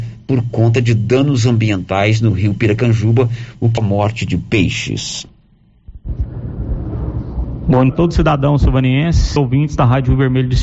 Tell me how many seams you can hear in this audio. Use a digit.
3